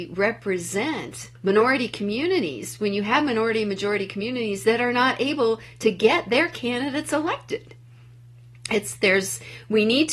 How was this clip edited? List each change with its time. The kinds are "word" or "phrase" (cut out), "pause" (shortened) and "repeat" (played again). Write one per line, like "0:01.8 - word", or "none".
0:01.4 - pause